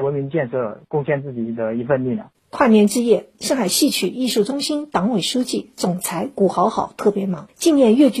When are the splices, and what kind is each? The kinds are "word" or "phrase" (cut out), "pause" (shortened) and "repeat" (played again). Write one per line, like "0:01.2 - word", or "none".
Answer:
0:02.4 - pause